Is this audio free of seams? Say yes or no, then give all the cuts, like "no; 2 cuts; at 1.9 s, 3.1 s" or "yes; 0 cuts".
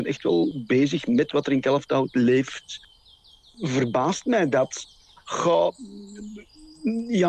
yes; 0 cuts